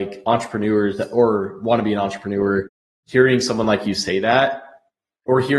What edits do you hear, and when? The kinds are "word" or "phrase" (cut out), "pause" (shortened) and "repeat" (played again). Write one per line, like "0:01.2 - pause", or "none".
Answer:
none